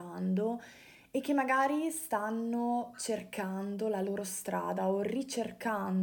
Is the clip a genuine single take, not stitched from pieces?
yes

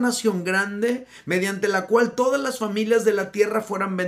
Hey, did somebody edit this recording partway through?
no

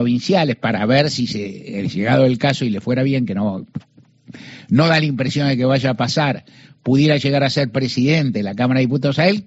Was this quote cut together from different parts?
no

